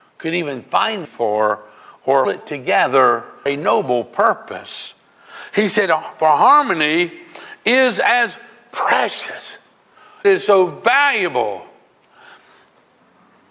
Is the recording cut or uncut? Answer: cut